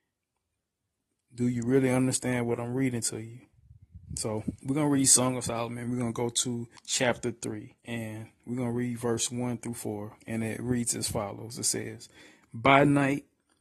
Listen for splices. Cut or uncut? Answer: cut